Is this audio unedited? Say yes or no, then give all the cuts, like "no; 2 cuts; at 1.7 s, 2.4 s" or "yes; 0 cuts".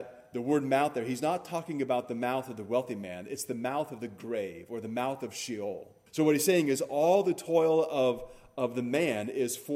no; 1 cut; at 6.1 s